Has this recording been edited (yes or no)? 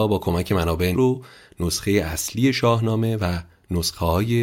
yes